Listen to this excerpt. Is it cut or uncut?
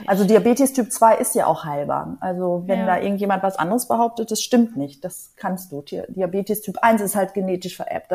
uncut